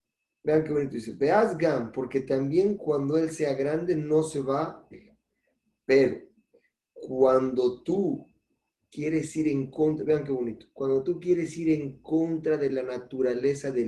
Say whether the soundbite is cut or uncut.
cut